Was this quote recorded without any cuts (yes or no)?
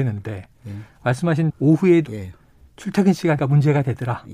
no